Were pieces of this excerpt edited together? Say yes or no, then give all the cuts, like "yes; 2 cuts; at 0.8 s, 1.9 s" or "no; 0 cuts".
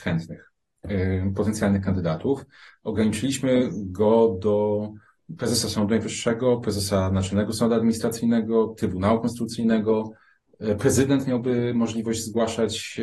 no; 0 cuts